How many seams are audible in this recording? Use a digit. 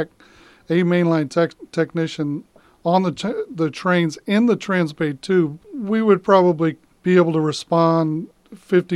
0